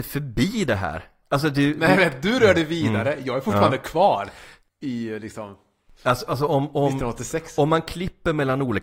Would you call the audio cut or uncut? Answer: uncut